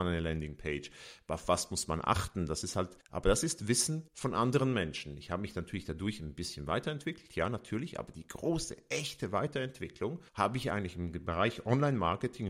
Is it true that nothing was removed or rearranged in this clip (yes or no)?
no